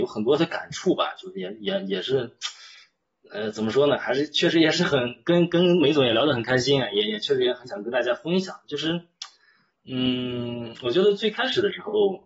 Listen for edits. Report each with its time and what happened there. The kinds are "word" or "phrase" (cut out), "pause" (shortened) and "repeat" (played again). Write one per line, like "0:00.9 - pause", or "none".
none